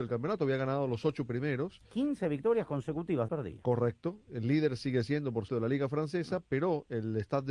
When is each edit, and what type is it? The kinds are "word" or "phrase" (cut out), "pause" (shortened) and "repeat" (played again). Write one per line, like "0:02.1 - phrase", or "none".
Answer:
0:03.3 - phrase
0:05.5 - word